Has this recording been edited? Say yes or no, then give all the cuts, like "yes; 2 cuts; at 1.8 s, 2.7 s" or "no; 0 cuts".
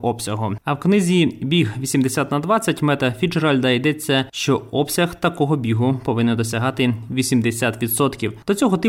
no; 0 cuts